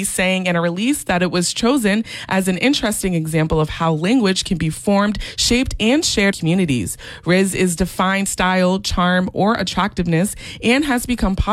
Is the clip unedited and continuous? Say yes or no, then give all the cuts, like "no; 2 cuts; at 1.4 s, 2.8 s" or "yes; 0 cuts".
no; 2 cuts; at 6.3 s, 8.3 s